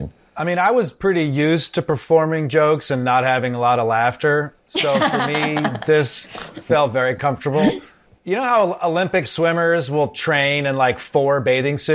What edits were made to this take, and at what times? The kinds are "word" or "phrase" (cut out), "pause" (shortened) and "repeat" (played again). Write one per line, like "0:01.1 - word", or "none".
none